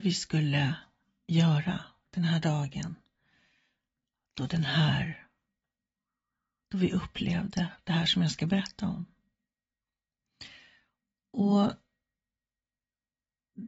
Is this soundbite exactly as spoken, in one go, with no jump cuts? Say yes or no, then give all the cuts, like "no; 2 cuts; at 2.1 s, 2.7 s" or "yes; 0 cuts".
yes; 0 cuts